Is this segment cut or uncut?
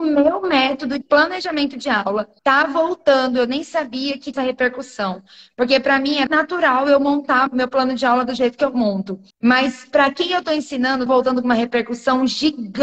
cut